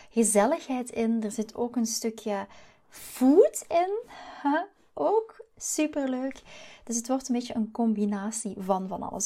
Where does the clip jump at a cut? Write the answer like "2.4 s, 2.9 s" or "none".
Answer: none